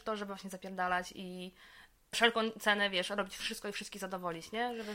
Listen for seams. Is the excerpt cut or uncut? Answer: cut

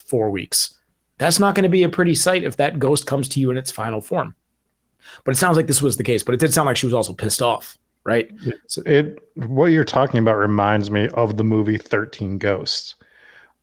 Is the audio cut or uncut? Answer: uncut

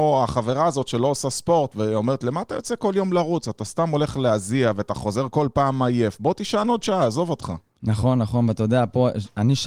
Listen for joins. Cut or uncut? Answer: uncut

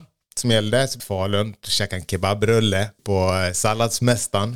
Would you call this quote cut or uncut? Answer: cut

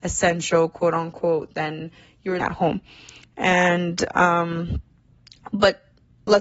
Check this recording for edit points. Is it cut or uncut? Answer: cut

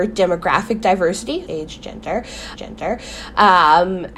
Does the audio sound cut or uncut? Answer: cut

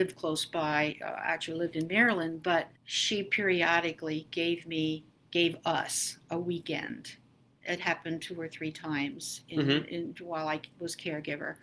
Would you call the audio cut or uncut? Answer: cut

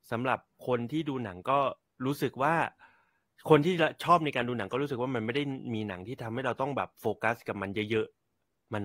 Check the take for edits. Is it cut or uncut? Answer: uncut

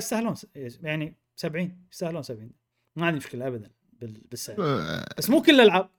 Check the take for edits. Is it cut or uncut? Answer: uncut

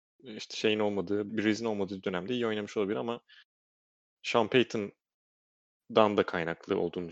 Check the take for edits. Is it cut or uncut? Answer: cut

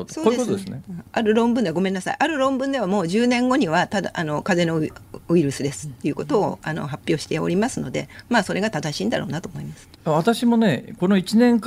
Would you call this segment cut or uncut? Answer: cut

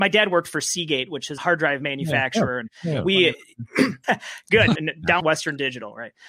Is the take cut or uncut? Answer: cut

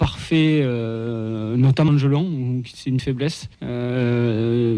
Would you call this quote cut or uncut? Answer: cut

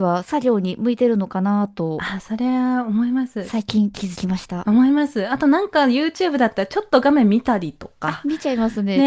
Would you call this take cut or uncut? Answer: uncut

